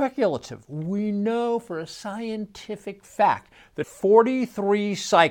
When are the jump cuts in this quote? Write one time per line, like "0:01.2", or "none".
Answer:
0:03.8